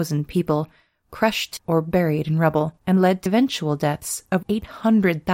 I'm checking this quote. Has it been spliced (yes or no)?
yes